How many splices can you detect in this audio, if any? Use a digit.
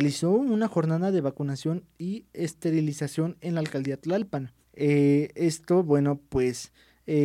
1